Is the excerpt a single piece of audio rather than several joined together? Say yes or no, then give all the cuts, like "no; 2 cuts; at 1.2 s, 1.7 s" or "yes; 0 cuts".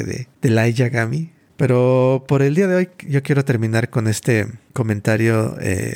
yes; 0 cuts